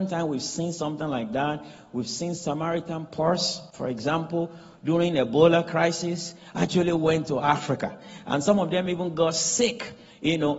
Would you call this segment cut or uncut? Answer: uncut